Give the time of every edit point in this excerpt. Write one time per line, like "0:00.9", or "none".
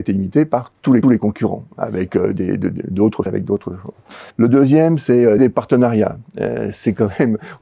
0:01.0
0:03.3
0:04.3
0:05.4